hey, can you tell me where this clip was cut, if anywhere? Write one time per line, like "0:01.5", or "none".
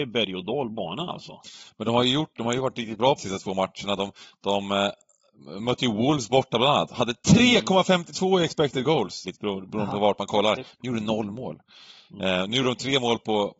0:03.2
0:09.2